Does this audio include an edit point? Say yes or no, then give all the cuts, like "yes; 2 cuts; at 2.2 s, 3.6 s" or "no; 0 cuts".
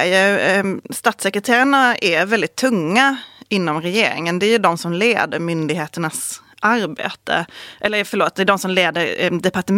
no; 0 cuts